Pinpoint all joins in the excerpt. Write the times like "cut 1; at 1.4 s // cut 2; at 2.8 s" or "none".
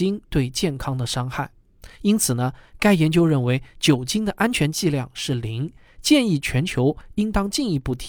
none